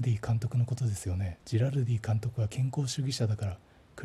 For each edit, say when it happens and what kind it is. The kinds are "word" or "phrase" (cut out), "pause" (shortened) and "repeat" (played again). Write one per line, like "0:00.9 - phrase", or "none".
0:01.4 - pause